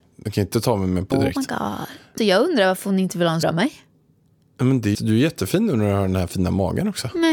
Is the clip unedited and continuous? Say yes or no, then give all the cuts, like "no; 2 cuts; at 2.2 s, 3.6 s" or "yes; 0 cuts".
no; 4 cuts; at 1.1 s, 2.2 s, 3.4 s, 4.9 s